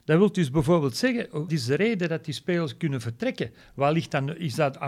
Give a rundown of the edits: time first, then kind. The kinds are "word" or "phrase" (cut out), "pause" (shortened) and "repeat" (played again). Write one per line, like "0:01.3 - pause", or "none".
0:01.5 - word